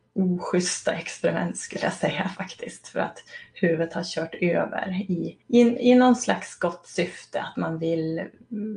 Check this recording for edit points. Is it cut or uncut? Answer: cut